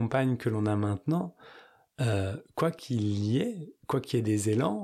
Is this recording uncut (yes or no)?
yes